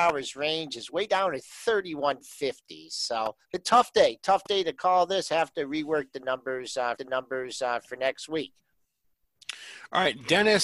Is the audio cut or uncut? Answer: cut